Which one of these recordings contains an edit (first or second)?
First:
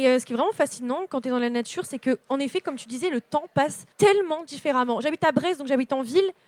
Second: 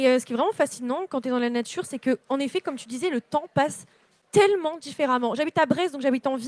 first